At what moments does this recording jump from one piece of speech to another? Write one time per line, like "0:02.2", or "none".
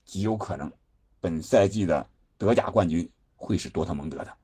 none